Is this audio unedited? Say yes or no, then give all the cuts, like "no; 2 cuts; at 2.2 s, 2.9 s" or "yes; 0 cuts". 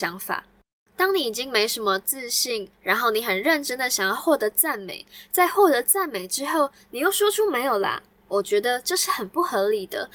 no; 1 cut; at 2.7 s